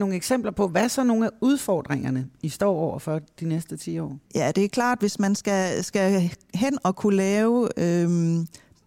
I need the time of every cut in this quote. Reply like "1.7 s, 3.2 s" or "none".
4.2 s